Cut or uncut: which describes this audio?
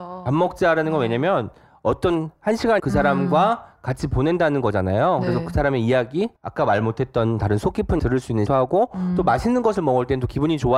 cut